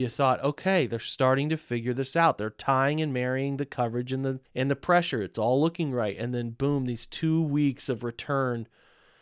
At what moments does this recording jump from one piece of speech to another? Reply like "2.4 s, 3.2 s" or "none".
4.5 s